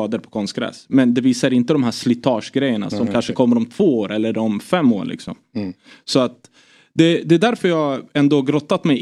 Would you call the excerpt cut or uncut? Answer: uncut